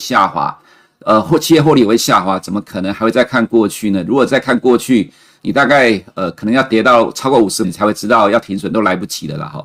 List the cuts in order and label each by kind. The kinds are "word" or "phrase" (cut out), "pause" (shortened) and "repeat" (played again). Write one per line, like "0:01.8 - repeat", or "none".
0:07.6 - word